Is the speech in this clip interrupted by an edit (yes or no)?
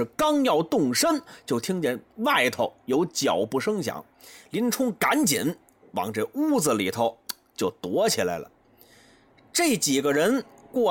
no